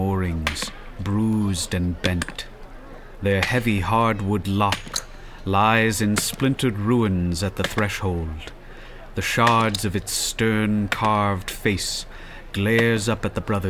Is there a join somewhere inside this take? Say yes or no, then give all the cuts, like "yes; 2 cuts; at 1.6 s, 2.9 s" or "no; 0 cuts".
no; 0 cuts